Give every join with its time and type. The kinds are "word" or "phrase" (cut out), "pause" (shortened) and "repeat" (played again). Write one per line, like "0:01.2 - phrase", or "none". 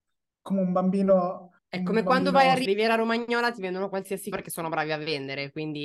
0:01.6 - pause
0:02.7 - word
0:04.3 - word